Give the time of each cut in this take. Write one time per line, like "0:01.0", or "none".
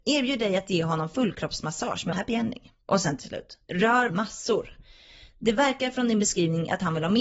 0:02.1
0:02.8
0:04.1